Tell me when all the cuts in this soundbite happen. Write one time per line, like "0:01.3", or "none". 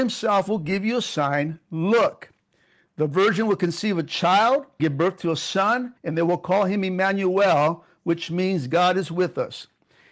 0:04.8
0:06.0